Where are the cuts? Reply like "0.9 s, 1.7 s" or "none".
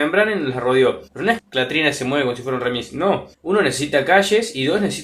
1.1 s, 1.4 s, 3.3 s